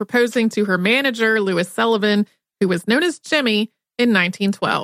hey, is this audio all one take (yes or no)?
yes